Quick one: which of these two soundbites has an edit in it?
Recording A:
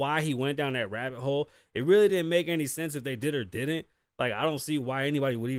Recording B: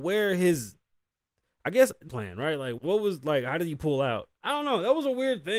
B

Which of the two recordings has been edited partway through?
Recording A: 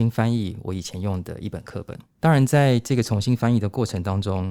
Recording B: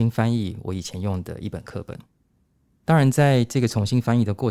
A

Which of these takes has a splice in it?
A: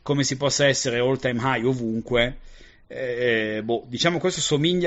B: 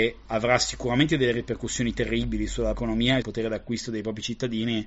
B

